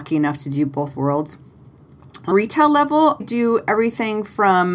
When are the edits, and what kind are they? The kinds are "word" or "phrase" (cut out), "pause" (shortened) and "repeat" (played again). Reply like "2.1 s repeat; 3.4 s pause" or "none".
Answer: 0.9 s word; 2.3 s word; 3.2 s word